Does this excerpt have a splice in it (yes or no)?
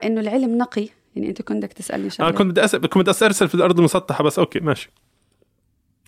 no